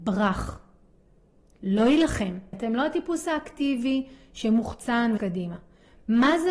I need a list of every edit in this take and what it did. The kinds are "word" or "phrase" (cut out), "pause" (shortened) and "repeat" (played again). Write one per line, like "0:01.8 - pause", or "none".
0:02.5 - word
0:05.2 - word